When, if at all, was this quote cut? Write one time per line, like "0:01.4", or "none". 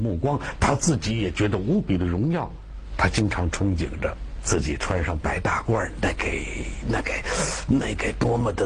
0:04.4